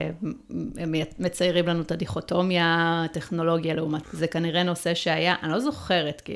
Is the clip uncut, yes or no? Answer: no